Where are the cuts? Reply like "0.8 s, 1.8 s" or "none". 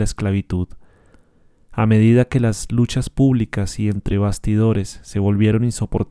none